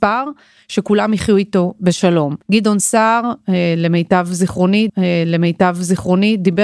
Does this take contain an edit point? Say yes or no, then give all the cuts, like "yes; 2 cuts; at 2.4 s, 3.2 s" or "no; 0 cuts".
yes; 2 cuts; at 2.4 s, 4.9 s